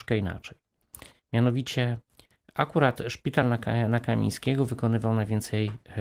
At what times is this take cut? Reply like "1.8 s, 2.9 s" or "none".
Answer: none